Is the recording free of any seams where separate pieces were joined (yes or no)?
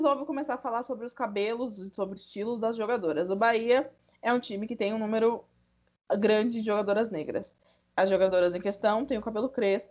no